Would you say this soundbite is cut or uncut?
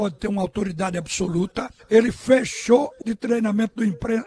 cut